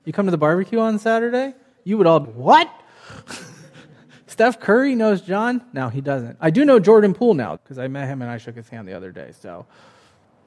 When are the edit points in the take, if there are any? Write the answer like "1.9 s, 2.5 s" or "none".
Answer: 2.2 s, 7.6 s